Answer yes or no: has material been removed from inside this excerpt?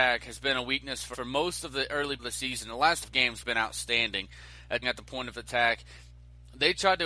yes